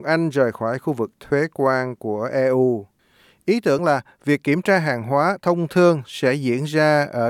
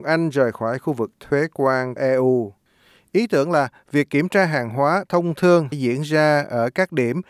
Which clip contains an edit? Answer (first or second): second